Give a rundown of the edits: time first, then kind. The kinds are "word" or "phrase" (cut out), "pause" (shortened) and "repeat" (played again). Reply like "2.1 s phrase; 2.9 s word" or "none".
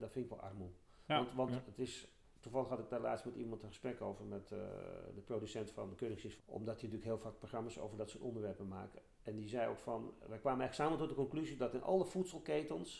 1.0 s pause; 6.4 s phrase